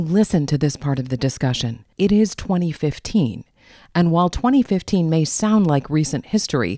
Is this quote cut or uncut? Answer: cut